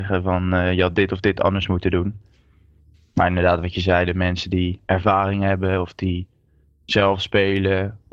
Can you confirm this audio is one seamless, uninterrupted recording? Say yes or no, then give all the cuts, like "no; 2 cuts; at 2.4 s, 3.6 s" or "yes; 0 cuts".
yes; 0 cuts